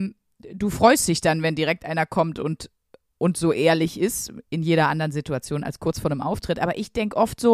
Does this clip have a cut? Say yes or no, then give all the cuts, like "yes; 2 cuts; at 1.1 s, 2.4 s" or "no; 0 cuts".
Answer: no; 0 cuts